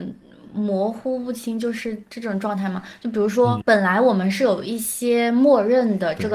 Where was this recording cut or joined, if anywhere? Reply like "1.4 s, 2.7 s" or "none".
3.6 s